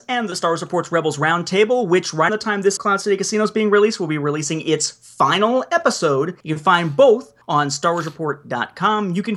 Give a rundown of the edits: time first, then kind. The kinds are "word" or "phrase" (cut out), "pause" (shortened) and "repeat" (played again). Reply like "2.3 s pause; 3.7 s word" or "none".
2.3 s word; 2.8 s phrase; 6.4 s pause; 7.4 s pause